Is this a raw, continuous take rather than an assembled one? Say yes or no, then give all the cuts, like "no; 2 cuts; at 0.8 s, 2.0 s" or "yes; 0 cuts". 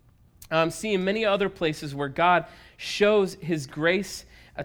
yes; 0 cuts